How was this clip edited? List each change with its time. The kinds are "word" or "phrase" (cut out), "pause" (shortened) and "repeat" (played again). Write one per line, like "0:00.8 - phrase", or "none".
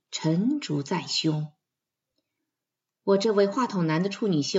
none